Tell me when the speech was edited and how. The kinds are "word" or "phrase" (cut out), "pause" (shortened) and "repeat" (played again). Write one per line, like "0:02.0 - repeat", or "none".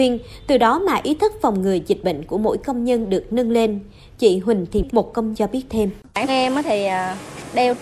0:04.9 - word
0:05.3 - word
0:06.3 - word